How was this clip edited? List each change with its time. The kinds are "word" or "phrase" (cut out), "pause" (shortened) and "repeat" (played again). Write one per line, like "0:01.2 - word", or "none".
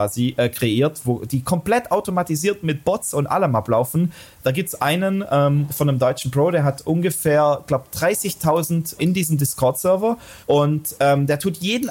0:09.0 - phrase
0:10.4 - pause